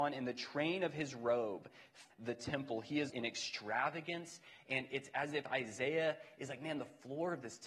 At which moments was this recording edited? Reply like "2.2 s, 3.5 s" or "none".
2.1 s, 3.1 s